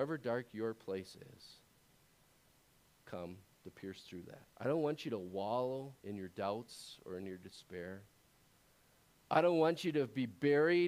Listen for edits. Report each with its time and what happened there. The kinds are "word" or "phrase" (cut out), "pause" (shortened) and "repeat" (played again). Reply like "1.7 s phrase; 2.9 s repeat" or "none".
3.0 s word; 4.5 s pause; 6.0 s pause

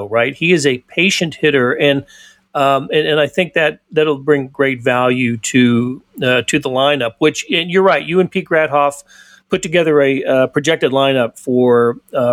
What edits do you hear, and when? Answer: none

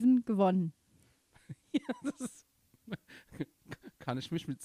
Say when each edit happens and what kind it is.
none

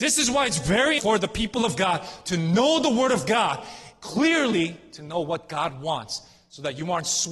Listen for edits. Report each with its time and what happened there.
1.0 s word

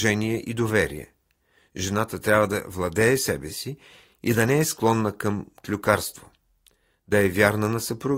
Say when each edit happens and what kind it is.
none

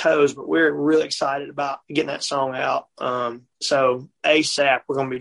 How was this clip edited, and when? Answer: 1.8 s pause

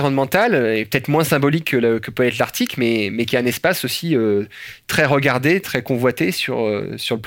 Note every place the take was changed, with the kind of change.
5.6 s word

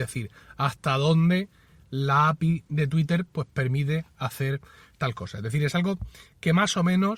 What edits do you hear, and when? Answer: none

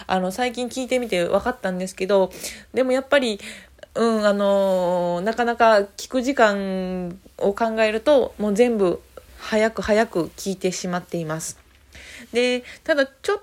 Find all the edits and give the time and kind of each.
9.3 s word

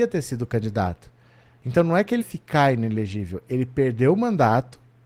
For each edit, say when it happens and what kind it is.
2.2 s word

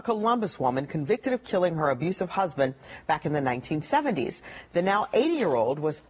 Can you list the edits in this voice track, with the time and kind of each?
none

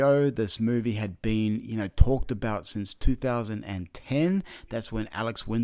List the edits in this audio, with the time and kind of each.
none

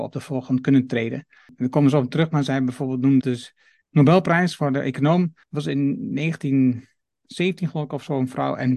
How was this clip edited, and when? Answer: 3.2 s word; 5.4 s pause

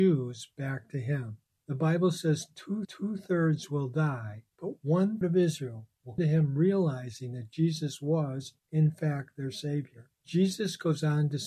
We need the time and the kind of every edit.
1.6 s pause; 2.8 s repeat; 4.5 s pause; 5.2 s word; 6.2 s word; 8.6 s pause; 10.1 s pause

